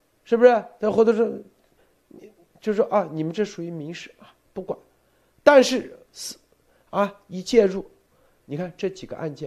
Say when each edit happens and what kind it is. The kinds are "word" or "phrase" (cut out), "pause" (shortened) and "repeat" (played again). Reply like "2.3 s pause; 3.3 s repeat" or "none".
6.0 s pause